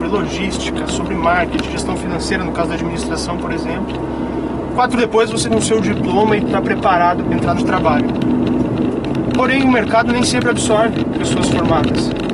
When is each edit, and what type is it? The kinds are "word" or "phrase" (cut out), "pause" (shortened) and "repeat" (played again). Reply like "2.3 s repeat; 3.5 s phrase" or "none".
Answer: 1.7 s word; 5.0 s word; 5.4 s word; 6.5 s word; 7.2 s word; 7.6 s word; 11.1 s word